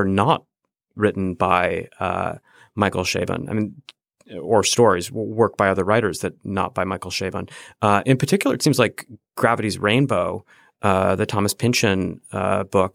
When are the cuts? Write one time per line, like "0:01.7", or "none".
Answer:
none